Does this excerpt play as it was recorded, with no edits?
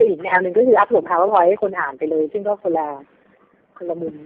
yes; 0 cuts

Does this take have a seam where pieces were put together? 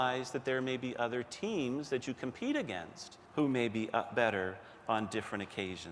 yes; 1 cut; at 3.2 s

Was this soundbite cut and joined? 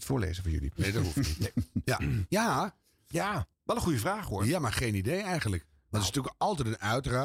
no; 0 cuts

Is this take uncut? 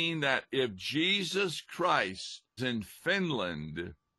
no; 1 cut; at 2.6 s

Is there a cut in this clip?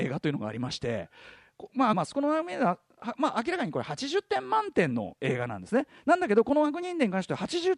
yes; 1 cut; at 1.9 s

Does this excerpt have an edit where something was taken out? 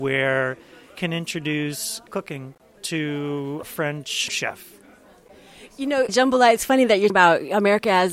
yes; 6 cuts; at 0.9 s, 2.1 s, 3.6 s, 4.3 s, 6.1 s, 7.1 s

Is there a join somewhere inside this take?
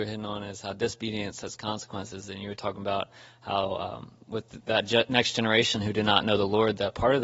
no; 0 cuts

